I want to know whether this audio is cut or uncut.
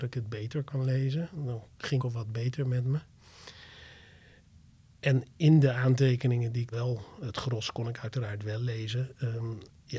cut